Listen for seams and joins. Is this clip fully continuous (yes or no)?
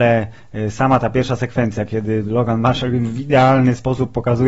yes